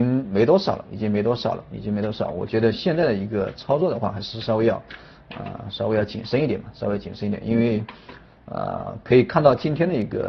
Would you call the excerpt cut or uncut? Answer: uncut